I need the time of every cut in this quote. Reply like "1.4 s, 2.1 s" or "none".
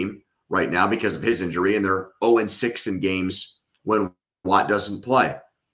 3.7 s